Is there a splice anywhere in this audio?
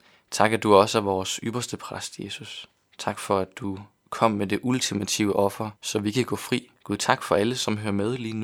yes; 3 cuts; at 2.8 s, 5.8 s, 6.8 s

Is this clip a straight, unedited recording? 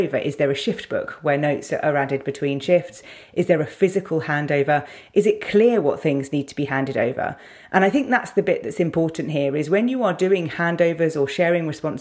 yes; 0 cuts

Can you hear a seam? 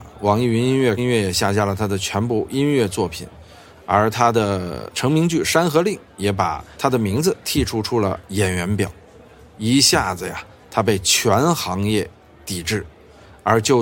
yes; 1 cut; at 1.0 s

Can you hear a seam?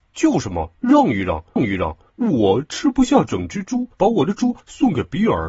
yes; 2 cuts; at 1.6 s, 3.9 s

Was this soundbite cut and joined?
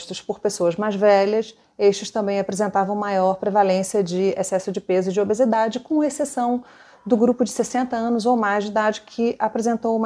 no; 0 cuts

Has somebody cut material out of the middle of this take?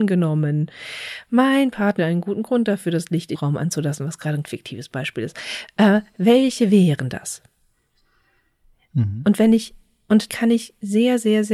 yes; 4 cuts; at 2.0 s, 3.3 s, 4.4 s, 10.3 s

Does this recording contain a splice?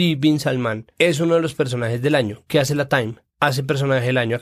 no; 0 cuts

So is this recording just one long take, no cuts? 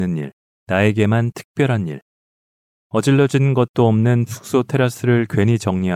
yes; 0 cuts

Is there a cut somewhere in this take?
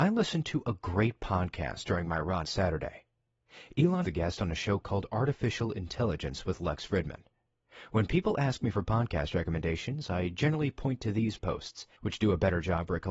yes; 4 cuts; at 2.4 s, 4.0 s, 11.4 s, 11.9 s

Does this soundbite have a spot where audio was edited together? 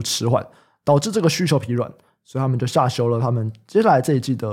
no; 0 cuts

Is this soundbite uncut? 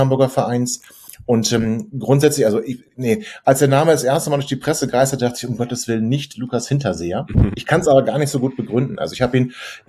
no; 1 cut; at 2.9 s

